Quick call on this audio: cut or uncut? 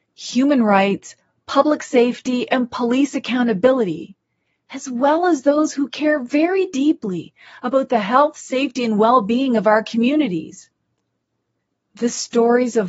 uncut